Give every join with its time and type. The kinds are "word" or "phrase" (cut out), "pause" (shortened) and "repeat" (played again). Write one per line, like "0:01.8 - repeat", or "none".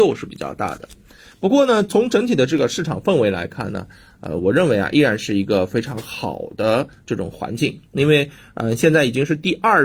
none